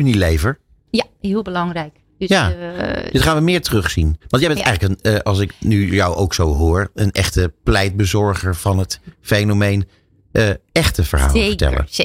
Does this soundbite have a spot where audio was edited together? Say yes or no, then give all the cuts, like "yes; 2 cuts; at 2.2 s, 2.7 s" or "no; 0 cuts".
yes; 1 cut; at 4.2 s